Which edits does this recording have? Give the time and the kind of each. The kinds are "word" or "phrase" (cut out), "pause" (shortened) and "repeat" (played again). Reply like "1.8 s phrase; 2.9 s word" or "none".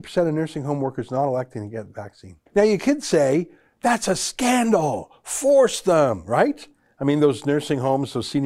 2.5 s pause